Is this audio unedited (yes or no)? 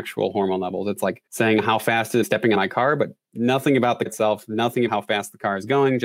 no